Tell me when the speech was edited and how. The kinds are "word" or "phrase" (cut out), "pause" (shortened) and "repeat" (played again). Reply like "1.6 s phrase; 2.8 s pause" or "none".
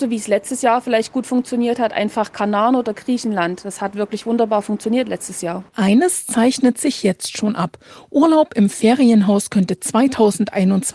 5.7 s pause